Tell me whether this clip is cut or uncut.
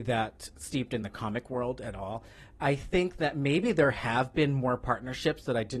uncut